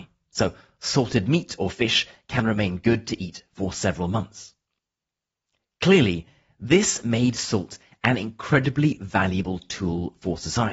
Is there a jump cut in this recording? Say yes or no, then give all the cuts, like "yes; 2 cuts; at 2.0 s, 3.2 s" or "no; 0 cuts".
no; 0 cuts